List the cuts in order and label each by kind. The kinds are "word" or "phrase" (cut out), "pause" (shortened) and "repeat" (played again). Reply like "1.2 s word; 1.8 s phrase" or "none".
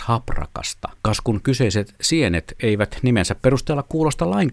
1.0 s pause